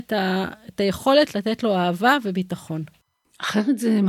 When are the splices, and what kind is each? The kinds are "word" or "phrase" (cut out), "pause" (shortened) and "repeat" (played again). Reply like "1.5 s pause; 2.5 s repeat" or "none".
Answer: none

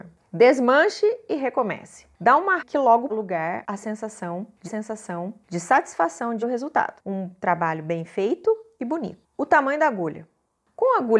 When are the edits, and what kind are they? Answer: 2.6 s phrase; 3.1 s phrase; 4.6 s repeat; 6.4 s word; 9.3 s pause

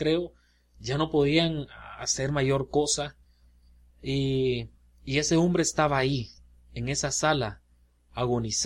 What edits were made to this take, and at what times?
none

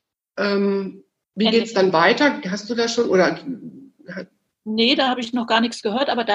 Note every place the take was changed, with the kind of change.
none

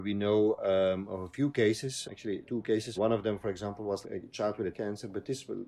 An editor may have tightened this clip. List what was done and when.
2.0 s word; 2.4 s word; 3.0 s word; 4.0 s word; 4.7 s word

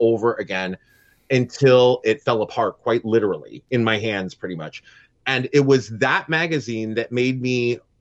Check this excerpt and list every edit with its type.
none

